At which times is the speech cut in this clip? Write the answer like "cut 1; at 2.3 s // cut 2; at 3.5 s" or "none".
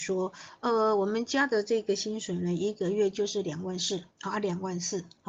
cut 1; at 4.1 s